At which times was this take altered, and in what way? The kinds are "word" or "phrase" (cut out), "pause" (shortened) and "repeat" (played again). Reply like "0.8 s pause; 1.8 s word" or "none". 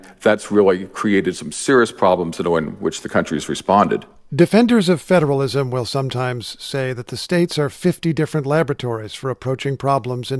none